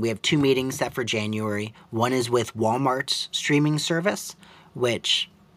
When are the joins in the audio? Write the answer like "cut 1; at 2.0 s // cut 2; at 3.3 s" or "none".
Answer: none